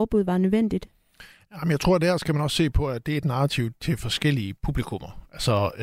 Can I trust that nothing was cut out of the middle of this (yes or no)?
yes